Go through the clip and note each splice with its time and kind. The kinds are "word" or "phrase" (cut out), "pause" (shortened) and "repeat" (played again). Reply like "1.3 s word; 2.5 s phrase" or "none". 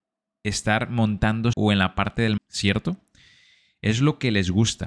1.5 s word; 2.4 s word